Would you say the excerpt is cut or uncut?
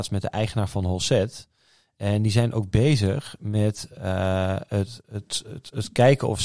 uncut